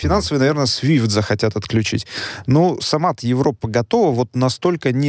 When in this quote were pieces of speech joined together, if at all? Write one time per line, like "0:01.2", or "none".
none

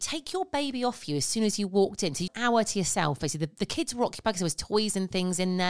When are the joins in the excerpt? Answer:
0:02.3

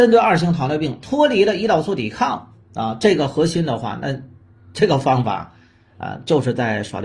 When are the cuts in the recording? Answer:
none

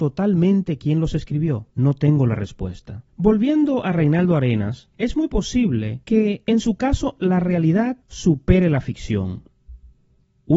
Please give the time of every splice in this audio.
0:01.7
0:03.1
0:04.9
0:06.0
0:08.0

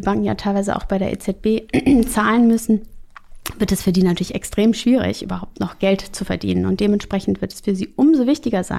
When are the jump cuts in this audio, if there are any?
none

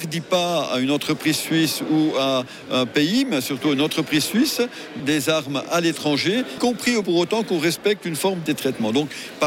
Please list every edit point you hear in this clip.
0:05.0
0:06.6
0:07.0
0:08.5

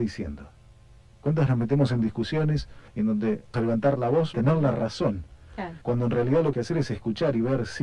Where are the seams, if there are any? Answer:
0:01.5
0:02.9
0:03.5
0:04.3
0:05.8
0:06.5

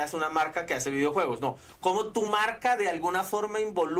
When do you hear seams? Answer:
none

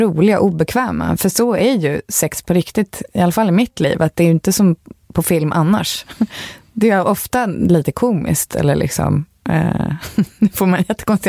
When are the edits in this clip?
none

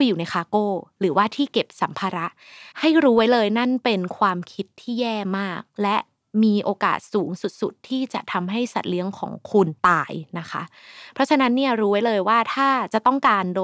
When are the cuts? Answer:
0:02.7
0:09.8

